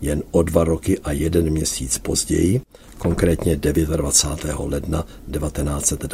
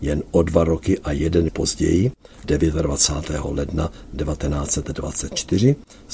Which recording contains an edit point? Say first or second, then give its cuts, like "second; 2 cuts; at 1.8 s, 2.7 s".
second; 2 cuts; at 1.5 s, 2.4 s